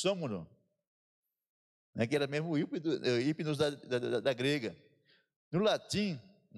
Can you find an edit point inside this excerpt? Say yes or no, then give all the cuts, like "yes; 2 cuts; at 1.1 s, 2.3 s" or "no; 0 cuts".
no; 0 cuts